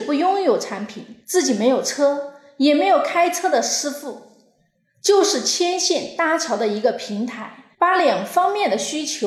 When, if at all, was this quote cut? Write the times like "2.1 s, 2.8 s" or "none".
1.2 s, 7.7 s